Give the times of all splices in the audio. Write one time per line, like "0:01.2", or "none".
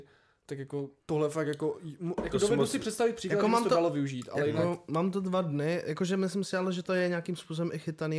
0:01.0